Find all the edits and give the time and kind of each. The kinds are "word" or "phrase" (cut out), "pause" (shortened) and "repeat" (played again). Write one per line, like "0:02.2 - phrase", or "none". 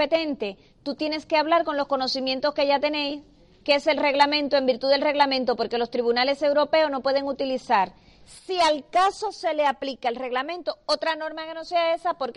none